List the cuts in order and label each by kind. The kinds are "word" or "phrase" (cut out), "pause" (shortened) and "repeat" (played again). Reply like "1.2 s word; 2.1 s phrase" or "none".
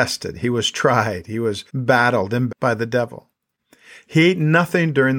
1.7 s pause; 2.5 s word